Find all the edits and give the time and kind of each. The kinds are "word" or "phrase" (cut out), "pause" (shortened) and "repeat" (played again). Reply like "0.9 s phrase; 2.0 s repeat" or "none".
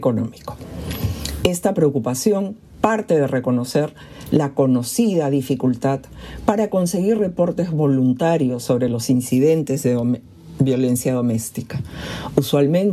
none